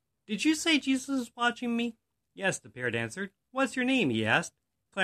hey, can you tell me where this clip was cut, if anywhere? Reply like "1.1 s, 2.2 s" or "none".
none

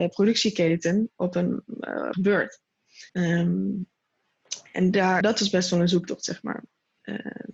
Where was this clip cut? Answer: 2.1 s, 3.1 s, 5.2 s

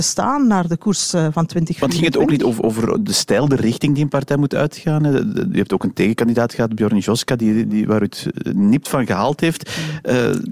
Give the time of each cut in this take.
none

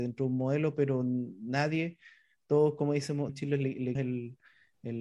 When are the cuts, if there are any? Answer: 3.3 s, 4.0 s

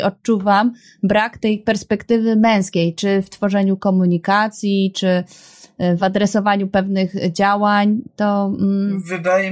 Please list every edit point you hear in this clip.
none

